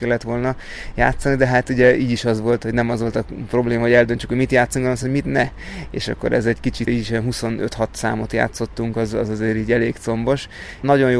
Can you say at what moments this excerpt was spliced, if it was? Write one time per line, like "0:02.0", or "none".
none